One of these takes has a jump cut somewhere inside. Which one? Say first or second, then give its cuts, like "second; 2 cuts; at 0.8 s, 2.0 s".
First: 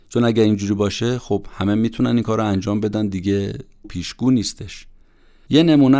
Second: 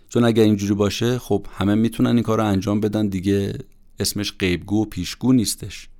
first; 1 cut; at 3.8 s